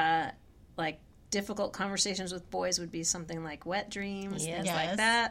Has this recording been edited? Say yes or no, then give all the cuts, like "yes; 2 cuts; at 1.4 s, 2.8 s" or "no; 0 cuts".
no; 0 cuts